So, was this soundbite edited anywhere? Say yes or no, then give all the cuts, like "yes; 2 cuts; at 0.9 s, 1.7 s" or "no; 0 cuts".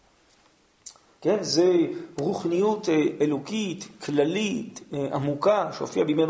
no; 0 cuts